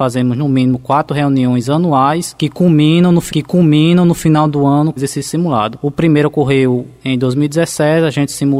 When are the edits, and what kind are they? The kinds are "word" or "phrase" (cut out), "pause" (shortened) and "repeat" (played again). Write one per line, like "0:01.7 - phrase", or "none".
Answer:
0:03.3 - repeat
0:05.0 - word